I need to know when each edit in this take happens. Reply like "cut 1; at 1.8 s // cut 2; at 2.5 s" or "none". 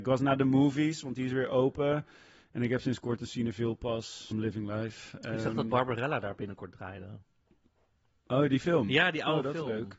cut 1; at 4.3 s